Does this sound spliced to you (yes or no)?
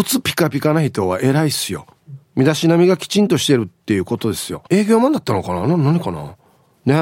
yes